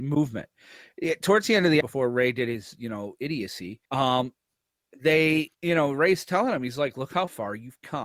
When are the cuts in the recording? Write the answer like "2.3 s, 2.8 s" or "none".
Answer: 1.8 s, 3.8 s, 5.5 s